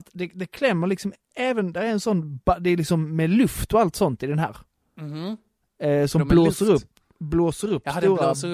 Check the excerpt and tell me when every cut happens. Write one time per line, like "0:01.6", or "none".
none